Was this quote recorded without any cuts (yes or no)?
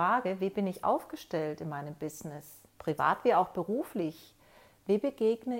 no